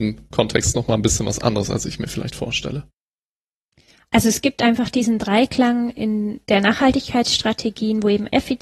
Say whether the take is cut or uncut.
uncut